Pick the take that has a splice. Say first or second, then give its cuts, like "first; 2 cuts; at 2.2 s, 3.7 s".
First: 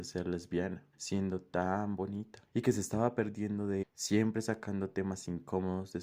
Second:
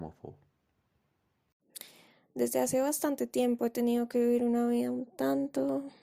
first; 3 cuts; at 0.9 s, 2.5 s, 3.8 s